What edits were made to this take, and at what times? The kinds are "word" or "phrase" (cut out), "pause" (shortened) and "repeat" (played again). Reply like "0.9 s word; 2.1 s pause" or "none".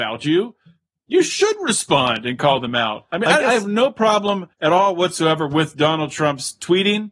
4.5 s pause